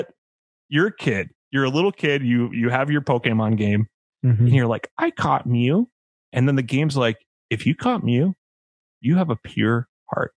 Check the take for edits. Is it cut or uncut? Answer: uncut